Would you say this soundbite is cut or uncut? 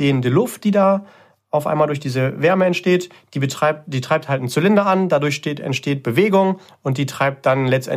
uncut